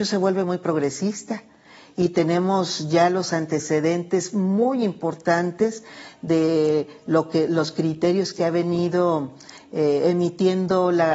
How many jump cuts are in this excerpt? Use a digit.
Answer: 0